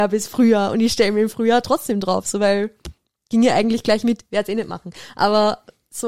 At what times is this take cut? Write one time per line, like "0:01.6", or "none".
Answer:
none

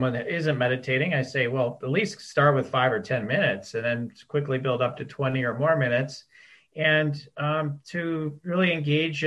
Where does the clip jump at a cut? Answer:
none

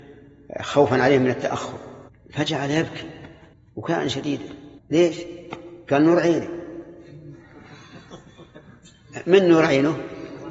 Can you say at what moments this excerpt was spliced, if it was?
0:02.1
0:03.5
0:04.8

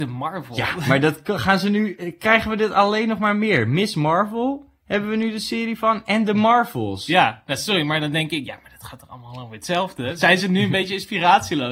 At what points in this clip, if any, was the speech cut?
none

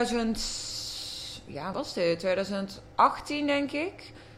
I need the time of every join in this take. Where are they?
0:01.7
0:02.9

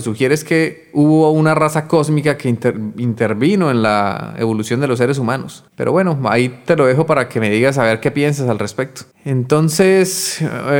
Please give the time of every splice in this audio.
0:05.7
0:09.1

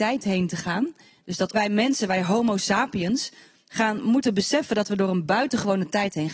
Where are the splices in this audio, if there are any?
0:01.5

